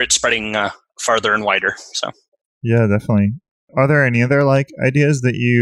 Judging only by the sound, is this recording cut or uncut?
uncut